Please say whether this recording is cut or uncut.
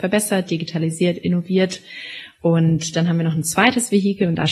uncut